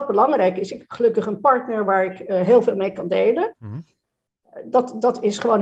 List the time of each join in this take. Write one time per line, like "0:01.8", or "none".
none